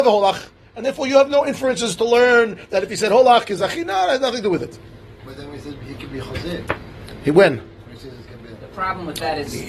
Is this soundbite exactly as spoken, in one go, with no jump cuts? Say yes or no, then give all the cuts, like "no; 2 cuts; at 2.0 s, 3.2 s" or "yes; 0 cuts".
yes; 0 cuts